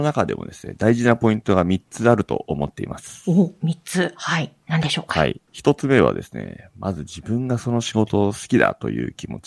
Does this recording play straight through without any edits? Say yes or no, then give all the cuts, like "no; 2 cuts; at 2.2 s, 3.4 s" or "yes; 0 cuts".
no; 1 cut; at 5.5 s